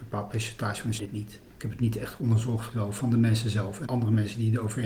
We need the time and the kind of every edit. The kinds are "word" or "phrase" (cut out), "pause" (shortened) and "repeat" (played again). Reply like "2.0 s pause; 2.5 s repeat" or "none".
1.0 s phrase; 2.7 s phrase; 3.9 s phrase